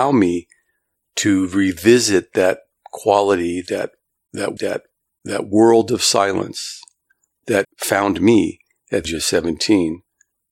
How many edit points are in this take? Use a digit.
3